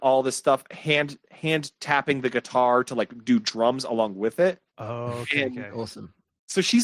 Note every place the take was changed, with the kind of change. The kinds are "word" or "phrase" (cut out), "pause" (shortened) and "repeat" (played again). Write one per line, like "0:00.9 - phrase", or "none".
0:04.7 - pause